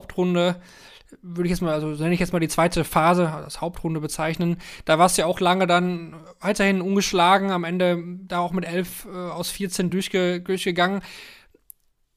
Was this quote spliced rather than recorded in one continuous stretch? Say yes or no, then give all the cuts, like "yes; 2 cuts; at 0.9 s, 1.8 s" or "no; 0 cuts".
no; 0 cuts